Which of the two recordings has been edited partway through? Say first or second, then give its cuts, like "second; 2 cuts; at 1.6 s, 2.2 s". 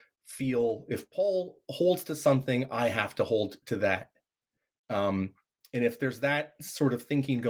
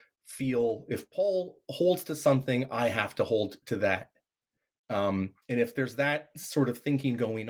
second; 1 cut; at 5.4 s